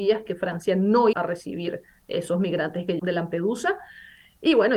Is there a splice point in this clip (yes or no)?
yes